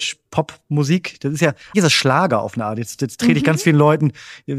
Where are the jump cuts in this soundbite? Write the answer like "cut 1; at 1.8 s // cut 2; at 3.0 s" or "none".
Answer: cut 1; at 1.7 s